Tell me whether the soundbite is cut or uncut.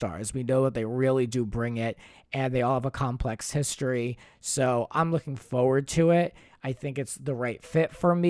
uncut